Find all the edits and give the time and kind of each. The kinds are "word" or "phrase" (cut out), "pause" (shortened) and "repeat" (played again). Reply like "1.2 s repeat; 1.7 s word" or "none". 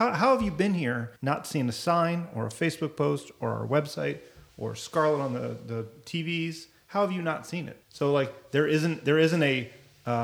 1.2 s pause; 7.8 s pause